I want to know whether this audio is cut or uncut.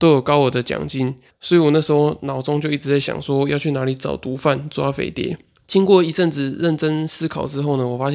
cut